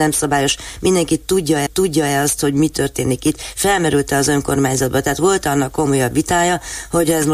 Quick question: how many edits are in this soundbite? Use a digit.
1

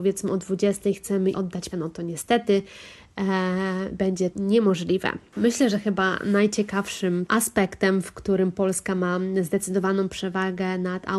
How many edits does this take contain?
4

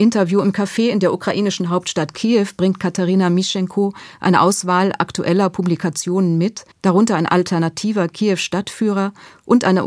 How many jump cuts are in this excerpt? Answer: 1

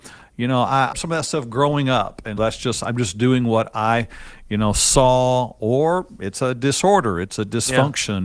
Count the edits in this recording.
2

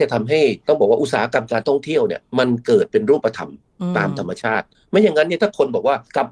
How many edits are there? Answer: 0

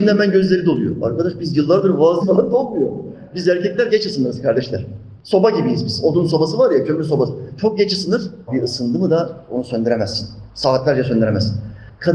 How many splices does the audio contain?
3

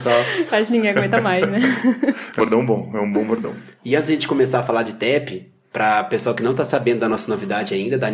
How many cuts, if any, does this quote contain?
1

